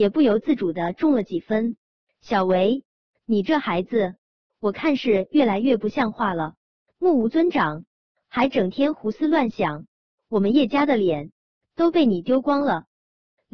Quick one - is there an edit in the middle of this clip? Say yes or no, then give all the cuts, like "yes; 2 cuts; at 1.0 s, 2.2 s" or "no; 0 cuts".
no; 0 cuts